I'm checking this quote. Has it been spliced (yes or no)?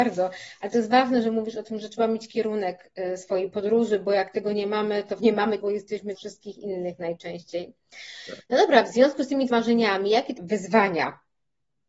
yes